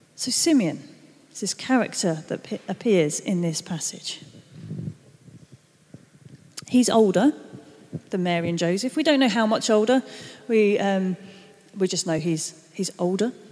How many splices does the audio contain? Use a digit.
0